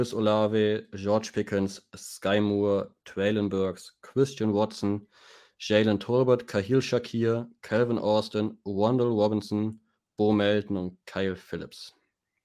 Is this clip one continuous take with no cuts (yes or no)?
yes